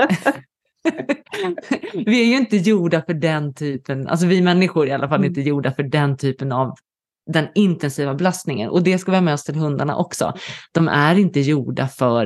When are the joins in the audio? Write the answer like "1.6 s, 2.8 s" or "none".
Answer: none